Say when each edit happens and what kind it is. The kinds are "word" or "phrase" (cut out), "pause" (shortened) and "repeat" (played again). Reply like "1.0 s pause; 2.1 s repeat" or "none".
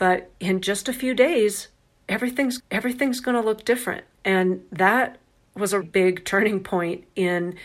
2.6 s repeat; 4.1 s pause; 5.8 s word